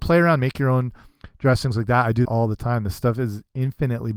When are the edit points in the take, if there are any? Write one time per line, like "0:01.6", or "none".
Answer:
0:02.2